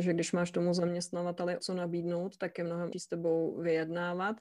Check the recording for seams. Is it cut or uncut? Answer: cut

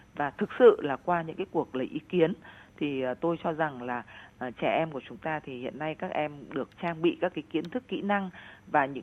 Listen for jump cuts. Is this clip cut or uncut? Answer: cut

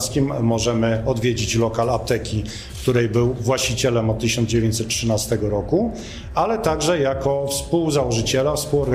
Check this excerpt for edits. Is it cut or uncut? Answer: uncut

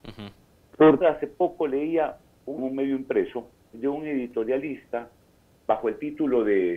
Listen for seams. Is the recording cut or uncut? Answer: cut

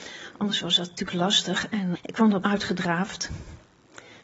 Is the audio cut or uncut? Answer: cut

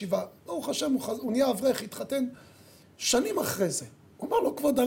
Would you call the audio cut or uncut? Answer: uncut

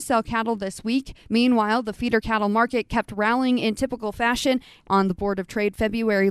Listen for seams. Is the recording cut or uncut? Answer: uncut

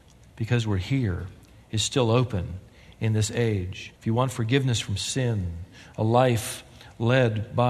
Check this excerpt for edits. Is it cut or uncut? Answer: cut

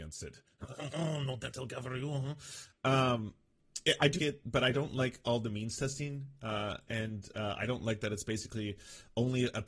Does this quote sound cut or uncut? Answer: cut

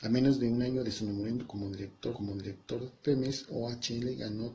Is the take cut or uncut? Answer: cut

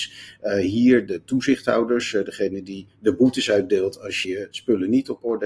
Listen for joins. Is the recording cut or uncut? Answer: cut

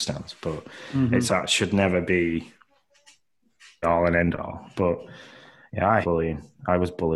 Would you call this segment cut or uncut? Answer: cut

